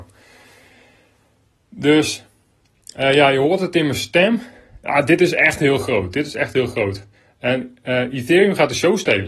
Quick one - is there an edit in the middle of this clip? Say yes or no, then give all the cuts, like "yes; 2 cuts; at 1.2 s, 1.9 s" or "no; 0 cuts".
no; 0 cuts